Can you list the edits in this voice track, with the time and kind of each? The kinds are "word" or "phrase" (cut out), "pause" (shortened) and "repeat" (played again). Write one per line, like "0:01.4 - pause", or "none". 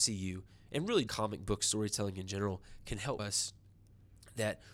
0:01.1 - word
0:03.2 - word